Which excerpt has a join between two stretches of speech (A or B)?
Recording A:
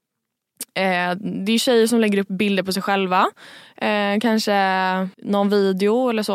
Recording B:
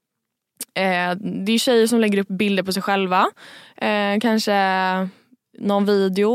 A